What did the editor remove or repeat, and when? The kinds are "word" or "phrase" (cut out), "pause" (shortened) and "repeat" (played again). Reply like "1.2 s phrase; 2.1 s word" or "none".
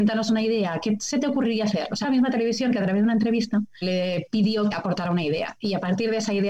2.0 s word; 3.8 s word; 4.7 s word

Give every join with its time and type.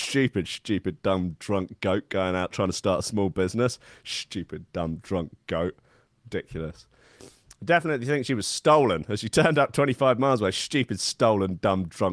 none

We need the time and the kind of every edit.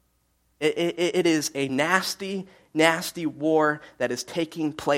none

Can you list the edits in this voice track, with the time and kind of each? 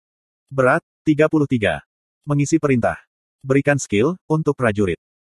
4.2 s word

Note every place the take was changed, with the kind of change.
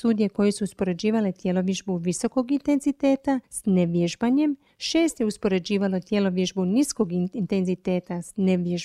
none

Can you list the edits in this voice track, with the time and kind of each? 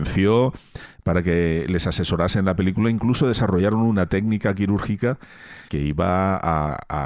5.7 s word

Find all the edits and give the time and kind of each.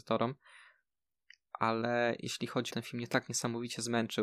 2.7 s phrase

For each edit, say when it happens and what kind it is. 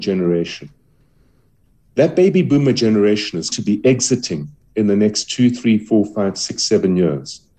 3.5 s word

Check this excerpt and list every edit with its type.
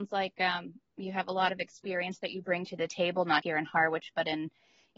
3.4 s word

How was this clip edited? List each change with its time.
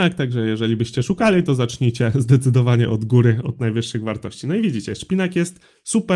none

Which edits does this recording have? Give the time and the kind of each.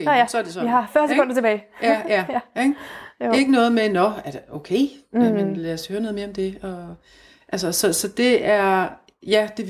none

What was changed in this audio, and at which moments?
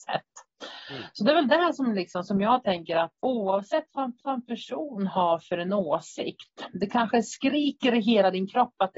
2.3 s word; 3.2 s pause; 4.2 s repeat

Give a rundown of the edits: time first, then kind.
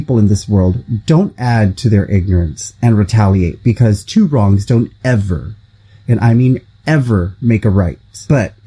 none

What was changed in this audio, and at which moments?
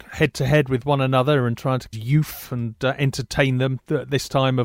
1.9 s phrase

